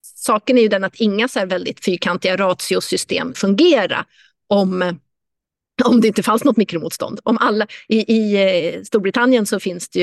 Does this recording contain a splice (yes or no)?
yes